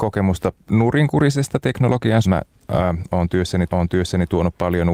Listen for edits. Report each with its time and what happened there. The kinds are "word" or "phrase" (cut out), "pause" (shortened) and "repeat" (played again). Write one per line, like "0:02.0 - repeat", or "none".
0:02.2 - phrase
0:03.7 - repeat